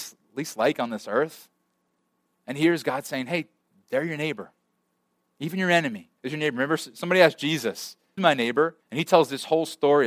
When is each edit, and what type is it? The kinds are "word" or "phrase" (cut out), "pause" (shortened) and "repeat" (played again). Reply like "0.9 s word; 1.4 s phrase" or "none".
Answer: 6.2 s pause; 8.2 s word; 8.8 s pause

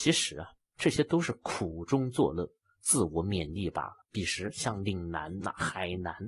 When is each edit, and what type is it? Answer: 4.0 s pause

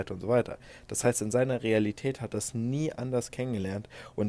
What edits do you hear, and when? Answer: none

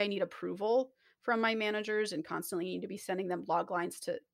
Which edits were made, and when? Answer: none

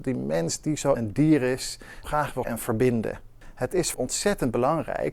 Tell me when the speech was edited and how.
0.9 s phrase; 2.0 s phrase; 2.4 s word; 3.9 s phrase

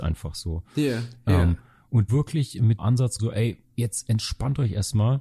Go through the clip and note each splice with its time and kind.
2.1 s word; 2.8 s word; 3.2 s word; 3.6 s pause

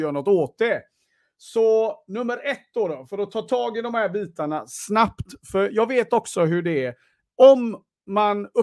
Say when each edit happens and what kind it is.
none

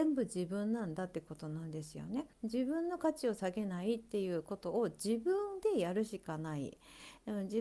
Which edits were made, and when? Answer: 2.3 s pause

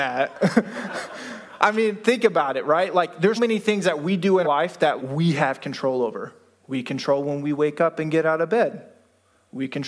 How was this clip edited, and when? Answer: 3.4 s word; 4.4 s word; 5.0 s word

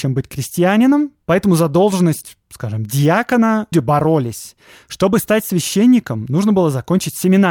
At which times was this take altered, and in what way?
1.2 s pause; 3.7 s word

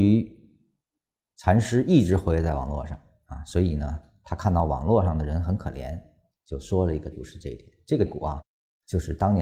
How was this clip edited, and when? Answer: 7.1 s word; 8.1 s word

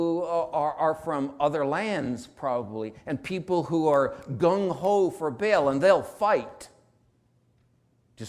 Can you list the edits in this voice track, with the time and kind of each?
none

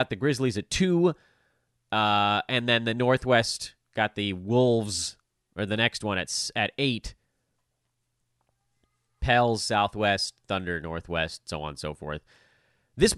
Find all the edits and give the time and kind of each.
none

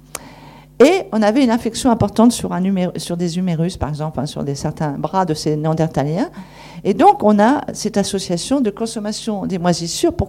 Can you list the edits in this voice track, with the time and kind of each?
none

